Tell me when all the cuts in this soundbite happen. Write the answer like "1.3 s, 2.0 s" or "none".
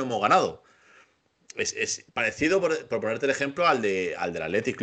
2.1 s